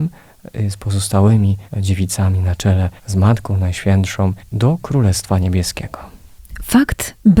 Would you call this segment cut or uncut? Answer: cut